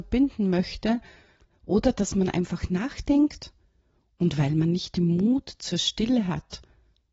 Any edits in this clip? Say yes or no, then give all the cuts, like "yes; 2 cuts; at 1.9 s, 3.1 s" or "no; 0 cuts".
no; 0 cuts